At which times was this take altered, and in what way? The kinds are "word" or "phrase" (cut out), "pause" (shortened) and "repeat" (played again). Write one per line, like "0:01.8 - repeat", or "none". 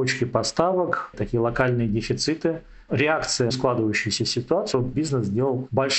0:01.1 - word
0:02.9 - word
0:03.5 - phrase
0:04.7 - phrase